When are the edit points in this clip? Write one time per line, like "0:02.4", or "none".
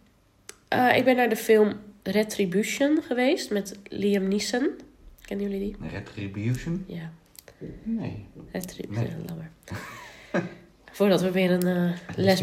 0:05.1

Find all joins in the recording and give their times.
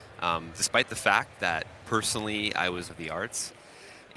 0:02.9

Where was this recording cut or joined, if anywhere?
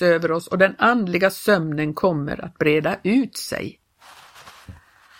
none

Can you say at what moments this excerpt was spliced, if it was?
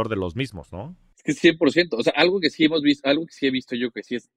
none

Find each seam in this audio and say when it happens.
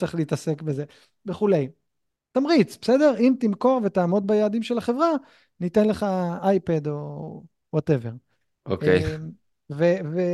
none

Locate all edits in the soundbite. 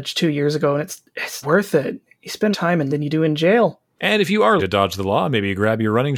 0:01.4
0:02.5
0:02.9
0:04.6

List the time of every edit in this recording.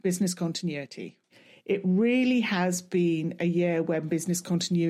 none

